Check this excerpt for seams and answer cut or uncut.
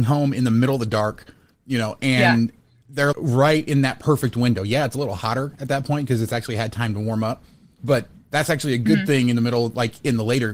cut